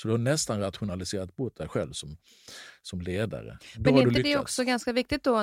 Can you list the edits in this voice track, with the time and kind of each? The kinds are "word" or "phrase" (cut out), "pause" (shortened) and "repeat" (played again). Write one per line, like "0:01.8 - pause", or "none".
none